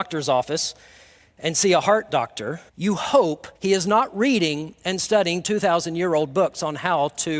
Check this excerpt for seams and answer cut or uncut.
cut